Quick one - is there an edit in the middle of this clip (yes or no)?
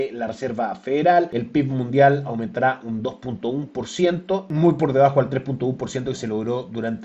no